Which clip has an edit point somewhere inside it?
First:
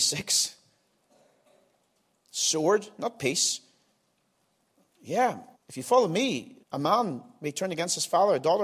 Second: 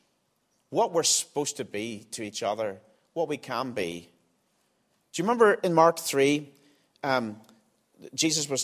first; 2 cuts; at 5.5 s, 6.6 s

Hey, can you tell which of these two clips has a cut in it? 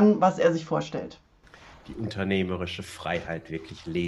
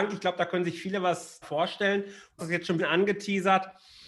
second; 3 cuts; at 1.4 s, 2.4 s, 2.8 s

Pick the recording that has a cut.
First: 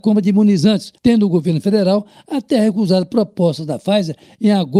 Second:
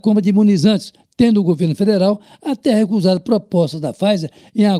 first; 1 cut; at 1.0 s

